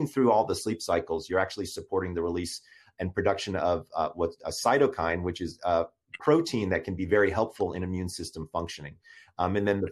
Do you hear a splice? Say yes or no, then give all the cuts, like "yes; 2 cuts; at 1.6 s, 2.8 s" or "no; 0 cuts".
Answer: no; 0 cuts